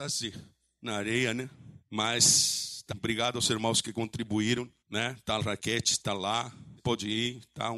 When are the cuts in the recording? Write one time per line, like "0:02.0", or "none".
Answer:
0:01.8
0:02.9
0:04.8
0:05.4
0:06.8